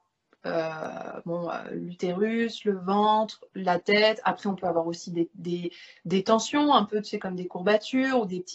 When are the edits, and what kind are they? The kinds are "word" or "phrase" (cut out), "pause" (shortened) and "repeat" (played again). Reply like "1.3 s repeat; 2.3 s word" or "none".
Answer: none